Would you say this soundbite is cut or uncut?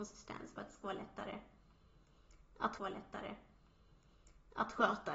cut